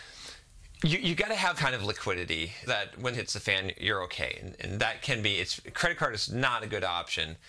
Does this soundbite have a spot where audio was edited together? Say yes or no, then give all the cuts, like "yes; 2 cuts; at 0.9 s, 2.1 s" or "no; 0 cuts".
yes; 3 cuts; at 1.6 s, 2.7 s, 3.1 s